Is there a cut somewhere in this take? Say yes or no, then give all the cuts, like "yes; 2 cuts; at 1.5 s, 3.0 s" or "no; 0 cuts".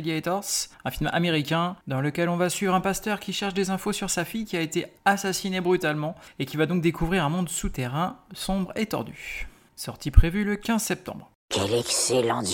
yes; 2 cuts; at 1.8 s, 11.4 s